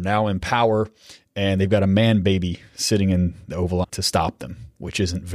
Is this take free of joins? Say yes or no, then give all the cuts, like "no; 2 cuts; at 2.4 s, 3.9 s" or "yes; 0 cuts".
no; 1 cut; at 3.8 s